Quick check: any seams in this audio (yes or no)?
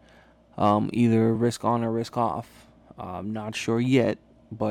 no